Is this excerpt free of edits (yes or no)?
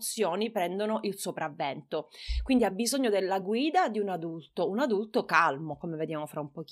yes